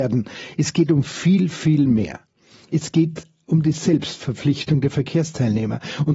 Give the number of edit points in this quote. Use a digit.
0